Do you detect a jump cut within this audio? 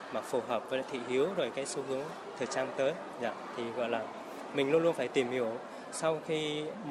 no; 0 cuts

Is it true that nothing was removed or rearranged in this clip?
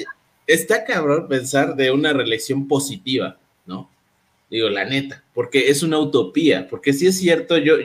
yes; 0 cuts

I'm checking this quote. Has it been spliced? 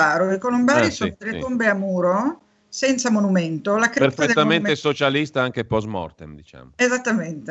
no; 0 cuts

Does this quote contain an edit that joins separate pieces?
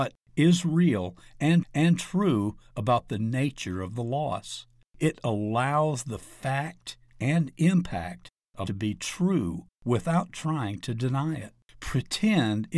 yes; 3 cuts; at 1.6 s, 8.7 s, 9.7 s

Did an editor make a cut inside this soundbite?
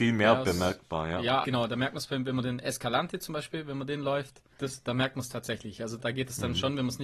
yes; 3 cuts; at 1.4 s, 4.5 s, 6.0 s

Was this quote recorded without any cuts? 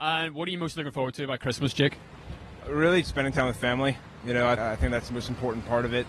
no; 2 cuts; at 3.0 s, 4.6 s

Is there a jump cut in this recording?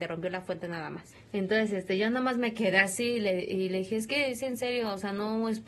no; 0 cuts

